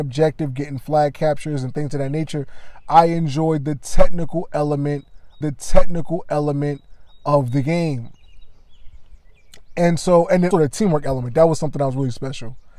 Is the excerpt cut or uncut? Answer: cut